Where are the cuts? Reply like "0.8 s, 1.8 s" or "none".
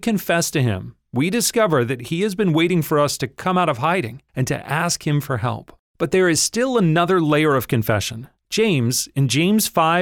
4.3 s, 5.9 s, 8.4 s